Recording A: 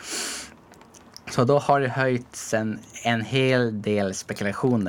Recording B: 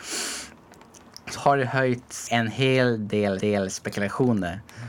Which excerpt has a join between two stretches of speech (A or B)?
B